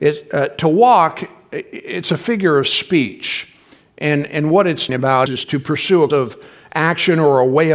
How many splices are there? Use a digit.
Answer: 3